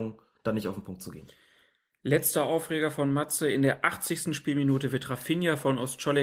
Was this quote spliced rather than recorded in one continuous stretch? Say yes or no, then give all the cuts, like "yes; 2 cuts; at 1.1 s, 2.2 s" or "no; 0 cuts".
no; 0 cuts